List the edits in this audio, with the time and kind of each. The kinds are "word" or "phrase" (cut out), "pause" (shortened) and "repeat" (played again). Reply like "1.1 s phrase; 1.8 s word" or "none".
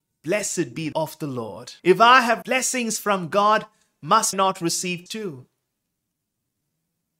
0.9 s word; 1.8 s pause; 2.4 s word; 4.3 s word; 5.1 s word